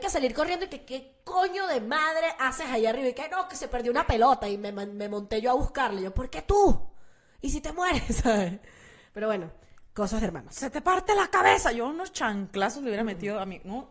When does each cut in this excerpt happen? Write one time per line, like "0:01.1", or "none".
none